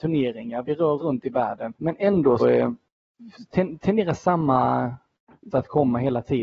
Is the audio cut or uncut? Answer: cut